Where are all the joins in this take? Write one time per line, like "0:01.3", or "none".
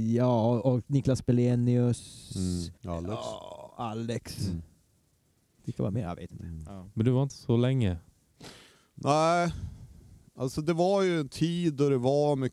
0:02.8
0:07.3